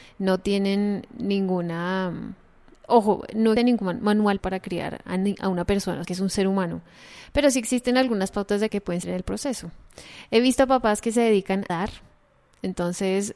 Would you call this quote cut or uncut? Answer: cut